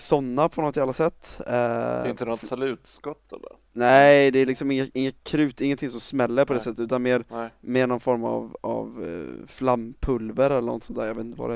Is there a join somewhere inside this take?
yes; 2 cuts; at 3.7 s, 5.2 s

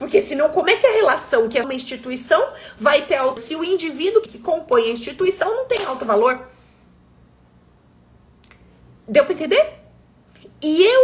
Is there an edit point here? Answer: yes; 3 cuts; at 1.6 s, 3.4 s, 4.3 s

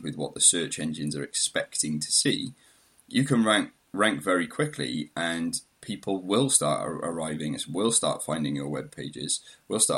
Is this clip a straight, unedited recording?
yes; 0 cuts

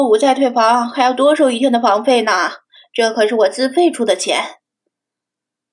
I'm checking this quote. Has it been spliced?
no; 0 cuts

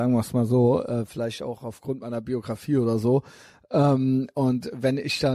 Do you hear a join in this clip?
no; 0 cuts

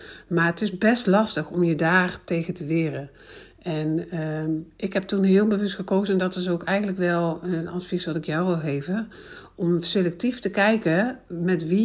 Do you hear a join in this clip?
no; 0 cuts

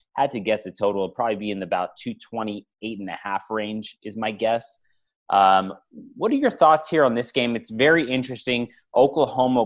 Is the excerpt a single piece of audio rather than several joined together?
yes; 0 cuts

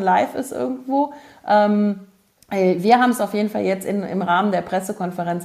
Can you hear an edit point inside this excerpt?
no; 0 cuts

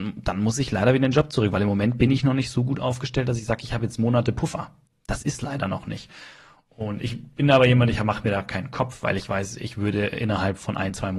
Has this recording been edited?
no; 0 cuts

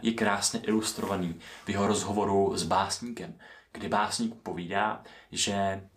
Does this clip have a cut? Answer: no; 0 cuts

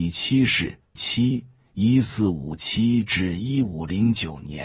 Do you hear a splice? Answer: yes; 1 cut; at 1.0 s

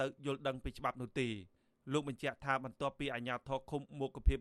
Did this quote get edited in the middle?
no; 0 cuts

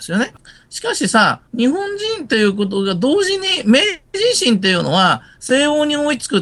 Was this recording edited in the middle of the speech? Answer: yes; 1 cut; at 1.5 s

